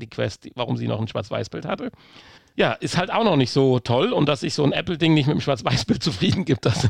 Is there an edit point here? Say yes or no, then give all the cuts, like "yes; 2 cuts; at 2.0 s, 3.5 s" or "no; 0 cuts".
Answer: yes; 1 cut; at 2.4 s